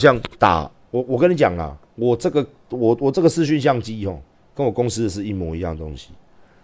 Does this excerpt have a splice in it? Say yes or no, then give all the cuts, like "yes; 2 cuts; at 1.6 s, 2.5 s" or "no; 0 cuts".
yes; 1 cut; at 4.3 s